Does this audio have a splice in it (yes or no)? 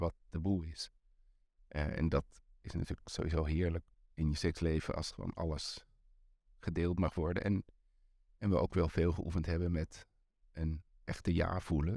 no